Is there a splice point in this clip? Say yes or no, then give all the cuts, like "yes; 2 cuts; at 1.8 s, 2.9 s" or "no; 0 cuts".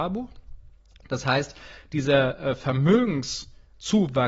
no; 0 cuts